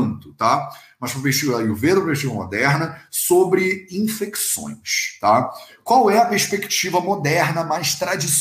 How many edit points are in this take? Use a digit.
0